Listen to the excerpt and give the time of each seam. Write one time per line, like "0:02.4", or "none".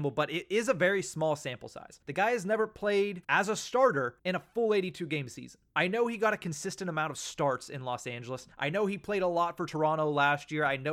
0:02.0
0:03.2
0:04.2
0:05.7
0:08.5